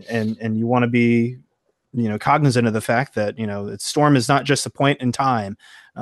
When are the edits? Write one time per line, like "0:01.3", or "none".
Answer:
none